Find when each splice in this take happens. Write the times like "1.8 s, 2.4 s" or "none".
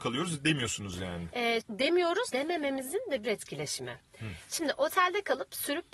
1.6 s, 2.3 s, 3.2 s

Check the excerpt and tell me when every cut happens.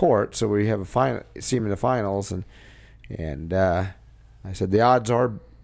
none

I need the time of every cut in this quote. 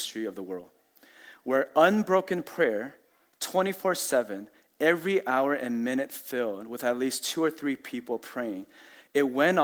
none

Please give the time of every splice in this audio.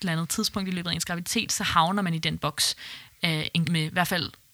3.6 s

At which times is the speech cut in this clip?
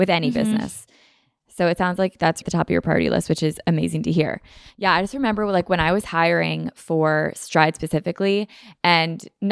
2.4 s

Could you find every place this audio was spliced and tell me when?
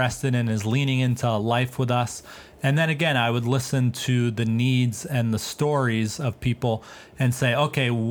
none

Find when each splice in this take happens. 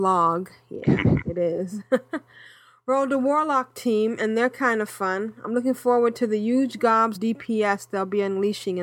7.2 s

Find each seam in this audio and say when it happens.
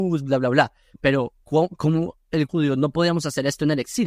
1.4 s, 2.5 s

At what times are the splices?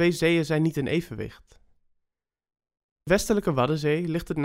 3.1 s

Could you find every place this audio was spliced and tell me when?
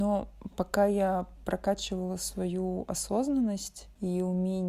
none

